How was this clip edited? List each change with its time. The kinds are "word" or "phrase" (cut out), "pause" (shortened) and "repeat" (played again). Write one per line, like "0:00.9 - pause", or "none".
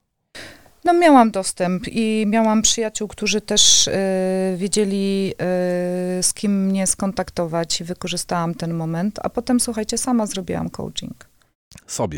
none